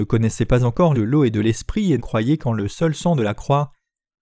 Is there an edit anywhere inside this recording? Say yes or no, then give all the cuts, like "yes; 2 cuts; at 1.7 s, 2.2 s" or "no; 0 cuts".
yes; 2 cuts; at 0.9 s, 2.0 s